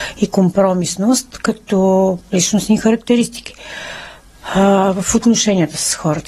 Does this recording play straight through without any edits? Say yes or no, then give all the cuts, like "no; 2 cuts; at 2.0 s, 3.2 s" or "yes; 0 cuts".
yes; 0 cuts